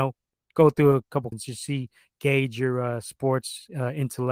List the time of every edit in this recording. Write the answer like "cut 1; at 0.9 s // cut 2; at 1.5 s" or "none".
cut 1; at 1.3 s